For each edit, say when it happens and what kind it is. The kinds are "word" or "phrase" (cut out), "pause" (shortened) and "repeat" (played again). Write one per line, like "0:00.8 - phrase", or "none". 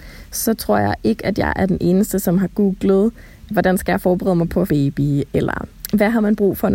0:04.7 - phrase